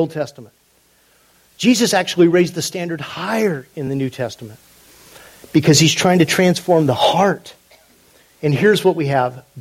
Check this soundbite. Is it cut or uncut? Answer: uncut